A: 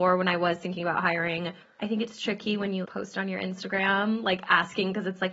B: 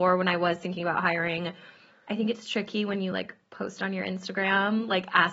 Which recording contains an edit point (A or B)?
A